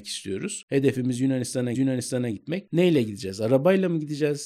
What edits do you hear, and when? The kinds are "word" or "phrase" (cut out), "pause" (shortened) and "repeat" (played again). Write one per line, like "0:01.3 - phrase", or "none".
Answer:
0:01.7 - repeat